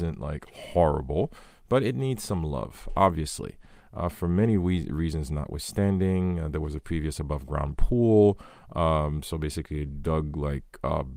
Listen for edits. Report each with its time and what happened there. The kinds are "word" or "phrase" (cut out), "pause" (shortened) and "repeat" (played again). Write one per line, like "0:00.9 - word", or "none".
none